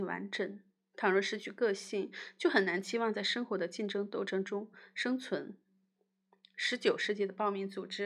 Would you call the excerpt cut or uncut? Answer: uncut